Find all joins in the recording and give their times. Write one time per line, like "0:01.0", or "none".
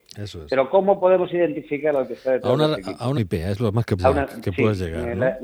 0:03.2
0:04.0